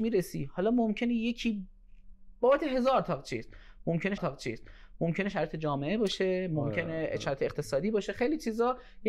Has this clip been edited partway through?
yes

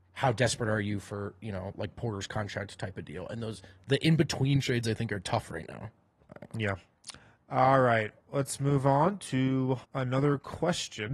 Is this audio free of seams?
no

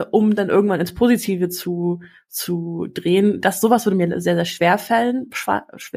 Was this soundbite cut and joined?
no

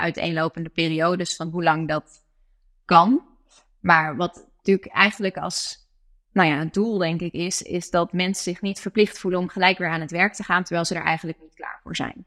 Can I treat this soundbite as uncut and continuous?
yes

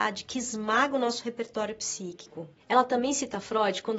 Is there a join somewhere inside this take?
no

